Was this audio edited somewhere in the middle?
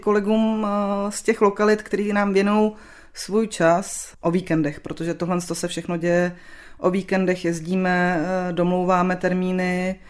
no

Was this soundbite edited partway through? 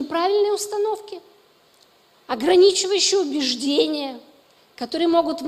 no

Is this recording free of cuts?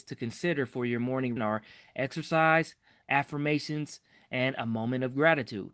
no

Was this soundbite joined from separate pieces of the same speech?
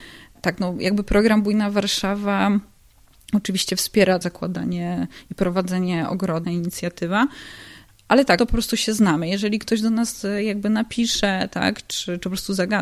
yes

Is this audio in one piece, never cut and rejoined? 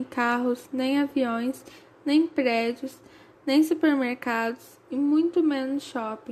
yes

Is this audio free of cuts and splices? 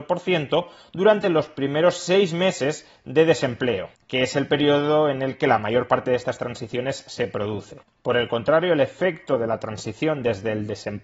yes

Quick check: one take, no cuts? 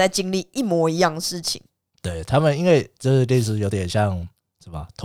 yes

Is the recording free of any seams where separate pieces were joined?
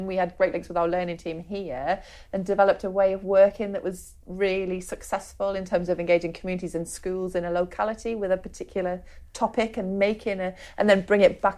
yes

